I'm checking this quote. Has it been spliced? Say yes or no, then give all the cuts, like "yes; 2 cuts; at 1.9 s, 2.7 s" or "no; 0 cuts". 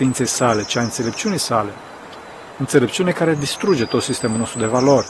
no; 0 cuts